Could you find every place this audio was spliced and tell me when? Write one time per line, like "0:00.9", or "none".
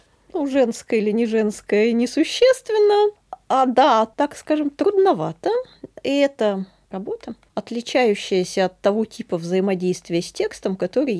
0:04.1
0:06.9